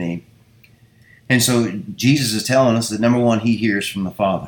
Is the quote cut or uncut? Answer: uncut